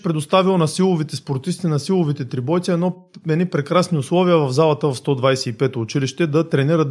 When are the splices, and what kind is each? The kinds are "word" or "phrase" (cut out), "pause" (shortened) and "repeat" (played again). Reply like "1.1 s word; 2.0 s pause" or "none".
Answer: none

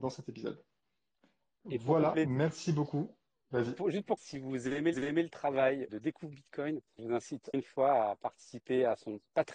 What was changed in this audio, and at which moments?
4.2 s word; 4.9 s repeat; 5.9 s word; 7.0 s word; 7.5 s word

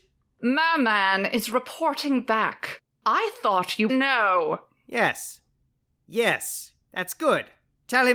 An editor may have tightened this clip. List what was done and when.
3.9 s phrase

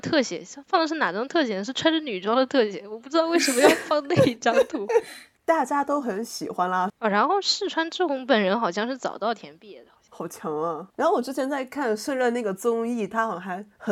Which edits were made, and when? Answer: 6.9 s phrase; 10.9 s pause

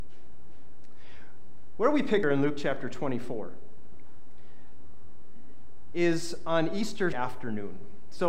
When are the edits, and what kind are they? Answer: 2.2 s phrase; 7.1 s word

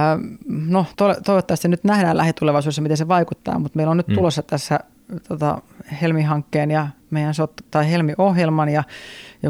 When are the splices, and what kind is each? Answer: 0.9 s pause

